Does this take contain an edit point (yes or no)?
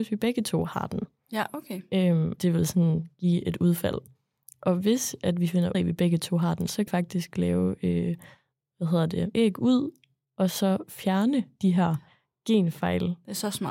yes